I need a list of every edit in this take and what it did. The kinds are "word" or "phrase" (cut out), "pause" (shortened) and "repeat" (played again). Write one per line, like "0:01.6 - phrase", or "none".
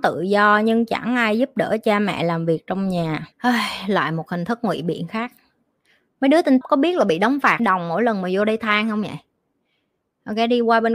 0:03.3 - pause
0:06.6 - word
0:07.6 - word

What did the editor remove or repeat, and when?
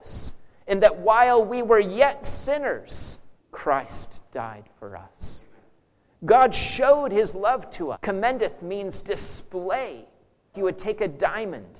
0:03.4 - pause
0:07.9 - word
0:09.0 - word
0:10.5 - word

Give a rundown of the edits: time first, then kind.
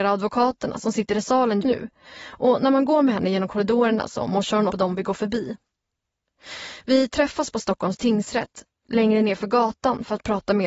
0:01.6 - word
0:04.7 - word

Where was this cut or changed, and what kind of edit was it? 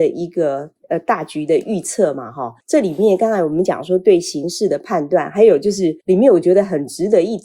0:02.6 - pause
0:06.0 - pause

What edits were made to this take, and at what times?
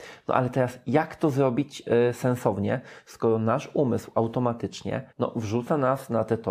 0:05.1 - pause

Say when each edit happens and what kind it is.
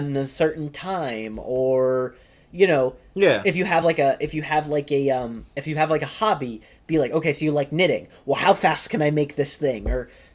none

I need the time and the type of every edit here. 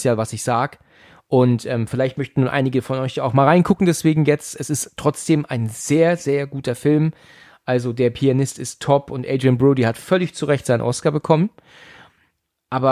none

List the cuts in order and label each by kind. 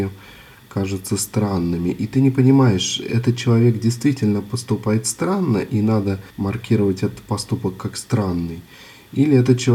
0:06.3 - pause

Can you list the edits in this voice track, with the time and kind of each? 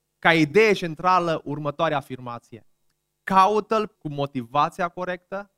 0:02.9 - pause
0:03.9 - word

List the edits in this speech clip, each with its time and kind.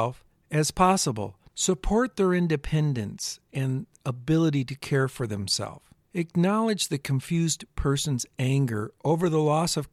0:01.5 - pause
0:06.0 - pause

